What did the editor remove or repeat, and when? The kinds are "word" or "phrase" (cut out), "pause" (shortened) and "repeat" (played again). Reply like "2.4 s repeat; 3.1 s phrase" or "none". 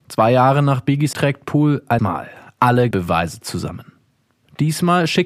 1.1 s word; 2.0 s word; 2.9 s word